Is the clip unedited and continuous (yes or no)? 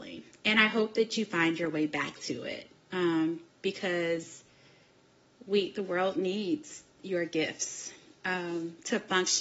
yes